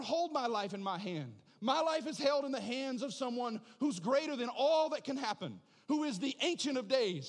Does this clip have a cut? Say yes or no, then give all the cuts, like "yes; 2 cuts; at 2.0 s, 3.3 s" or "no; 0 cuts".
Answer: no; 0 cuts